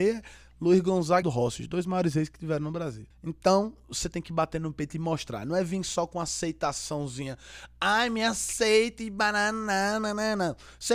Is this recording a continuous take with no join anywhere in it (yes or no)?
no